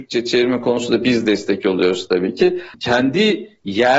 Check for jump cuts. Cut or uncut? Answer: uncut